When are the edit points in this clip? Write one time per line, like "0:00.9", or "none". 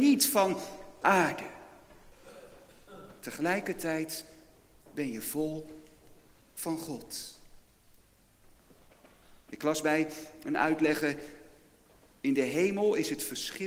0:01.0